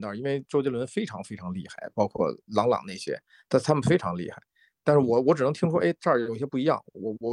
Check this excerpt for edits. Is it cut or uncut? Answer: uncut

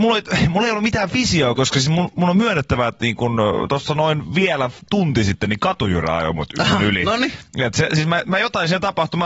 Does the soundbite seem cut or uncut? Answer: uncut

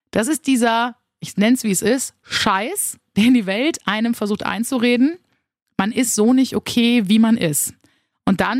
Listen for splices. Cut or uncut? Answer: uncut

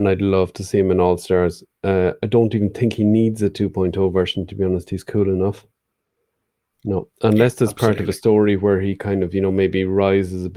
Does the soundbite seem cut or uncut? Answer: uncut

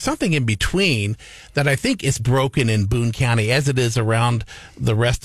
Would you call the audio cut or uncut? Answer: cut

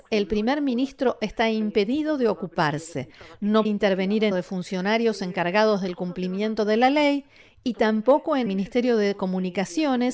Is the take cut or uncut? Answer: cut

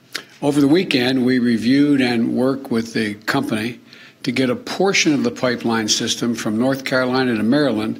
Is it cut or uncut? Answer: uncut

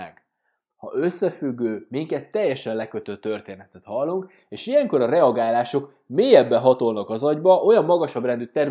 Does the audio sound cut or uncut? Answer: uncut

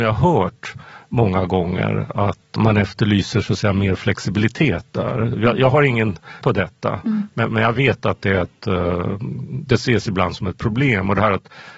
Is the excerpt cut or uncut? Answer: cut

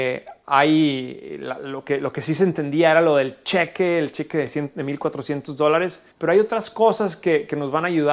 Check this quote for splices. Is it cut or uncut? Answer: cut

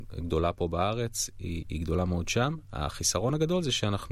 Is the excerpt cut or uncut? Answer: uncut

